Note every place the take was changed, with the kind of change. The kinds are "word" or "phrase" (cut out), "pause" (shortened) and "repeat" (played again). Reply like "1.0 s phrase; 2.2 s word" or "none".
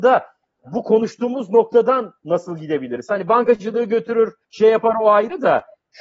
4.4 s pause